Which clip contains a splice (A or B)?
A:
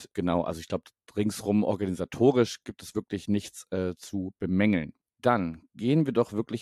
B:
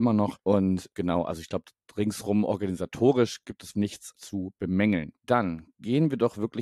B